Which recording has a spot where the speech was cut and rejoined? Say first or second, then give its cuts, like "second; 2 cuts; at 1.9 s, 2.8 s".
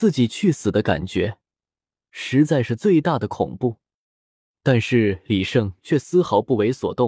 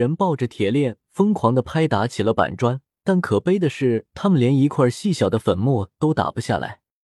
second; 1 cut; at 2.9 s